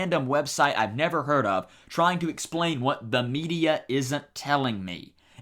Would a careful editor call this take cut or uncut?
uncut